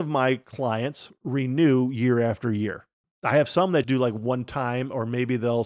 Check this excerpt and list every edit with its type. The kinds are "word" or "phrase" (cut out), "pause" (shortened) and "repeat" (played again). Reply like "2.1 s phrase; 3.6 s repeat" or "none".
2.9 s pause; 3.8 s word